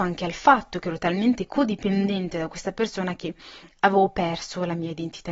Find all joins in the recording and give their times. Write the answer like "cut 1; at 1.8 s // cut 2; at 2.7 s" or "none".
none